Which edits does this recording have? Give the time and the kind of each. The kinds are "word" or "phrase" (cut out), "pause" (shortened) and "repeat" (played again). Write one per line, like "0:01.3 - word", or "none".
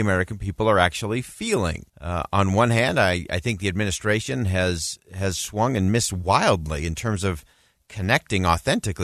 0:01.9 - pause